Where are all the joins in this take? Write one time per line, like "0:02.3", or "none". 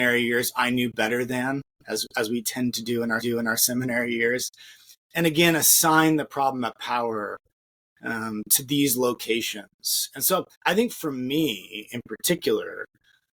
0:03.2
0:10.5